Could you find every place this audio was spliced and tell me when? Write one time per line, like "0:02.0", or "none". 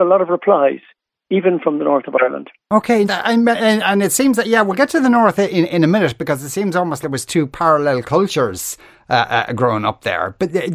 0:03.0
0:07.0